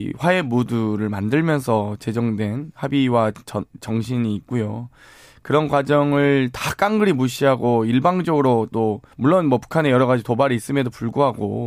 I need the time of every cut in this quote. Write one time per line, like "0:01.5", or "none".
0:09.1